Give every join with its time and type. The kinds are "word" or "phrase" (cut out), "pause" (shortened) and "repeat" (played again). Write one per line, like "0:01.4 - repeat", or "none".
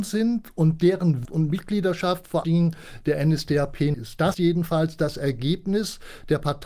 0:01.2 - word
0:02.4 - word
0:03.9 - word
0:04.3 - word